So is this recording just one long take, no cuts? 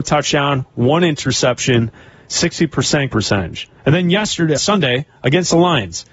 no; 3 cuts; at 3.1 s, 3.8 s, 4.6 s

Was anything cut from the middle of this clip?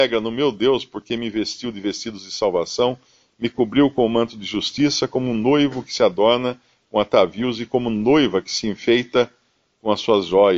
no; 0 cuts

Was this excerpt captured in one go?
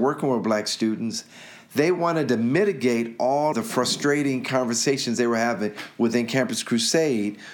no; 1 cut; at 3.5 s

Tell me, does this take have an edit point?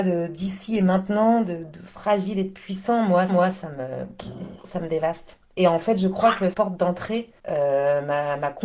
yes; 3 cuts; at 3.3 s, 6.5 s, 7.4 s

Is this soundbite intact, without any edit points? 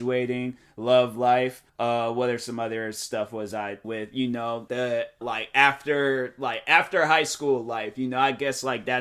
no; 4 cuts; at 1.7 s, 3.8 s, 4.7 s, 5.2 s

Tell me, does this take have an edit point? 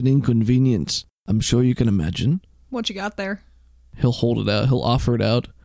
no; 0 cuts

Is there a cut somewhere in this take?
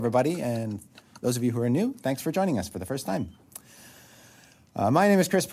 no; 0 cuts

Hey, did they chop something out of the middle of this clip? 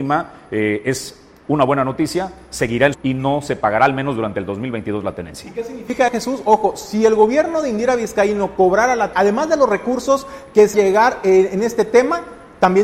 yes; 4 cuts; at 2.9 s, 6.1 s, 9.1 s, 10.7 s

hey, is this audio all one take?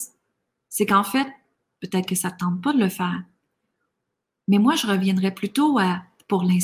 yes; 0 cuts

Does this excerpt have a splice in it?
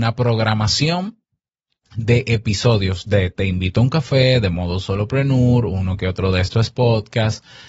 no; 0 cuts

